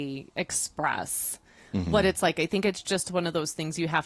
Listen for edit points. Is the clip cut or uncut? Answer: uncut